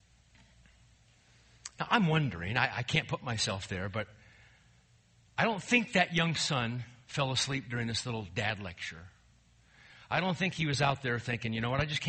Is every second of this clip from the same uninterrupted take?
yes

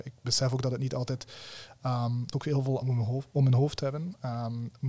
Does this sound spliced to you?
yes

